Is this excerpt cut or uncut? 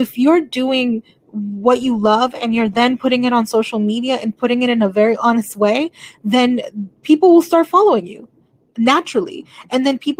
uncut